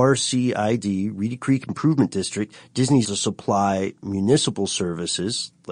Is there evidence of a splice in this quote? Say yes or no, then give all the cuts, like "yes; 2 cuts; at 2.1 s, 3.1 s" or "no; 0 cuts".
yes; 1 cut; at 3.0 s